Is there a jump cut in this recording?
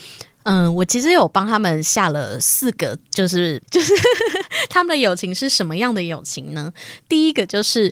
yes; 2 cuts; at 3.0 s, 3.6 s

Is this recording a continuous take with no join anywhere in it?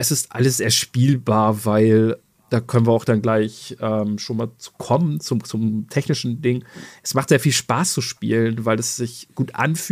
yes; 0 cuts

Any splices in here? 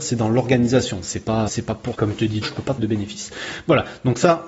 yes; 4 cuts; at 1.5 s, 1.9 s, 2.4 s, 2.8 s

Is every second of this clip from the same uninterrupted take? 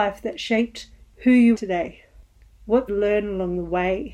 no; 2 cuts; at 1.5 s, 2.9 s

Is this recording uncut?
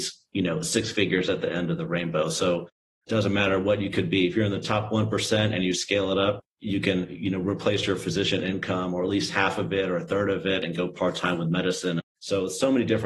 yes; 0 cuts

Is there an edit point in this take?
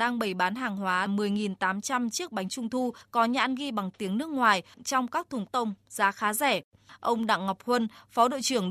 yes; 3 cuts; at 1.1 s, 4.7 s, 5.5 s

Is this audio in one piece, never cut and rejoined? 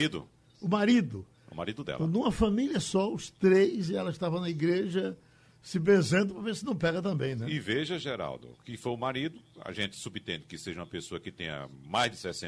yes; 0 cuts

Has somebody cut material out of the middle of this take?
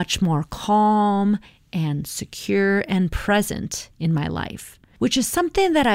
no; 0 cuts

